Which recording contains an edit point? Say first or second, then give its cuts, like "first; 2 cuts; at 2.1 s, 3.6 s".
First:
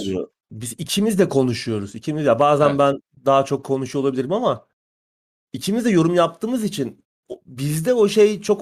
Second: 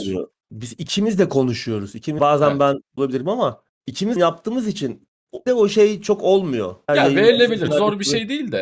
second; 7 cuts; at 2.2 s, 3.0 s, 3.7 s, 4.2 s, 5.5 s, 6.9 s, 7.7 s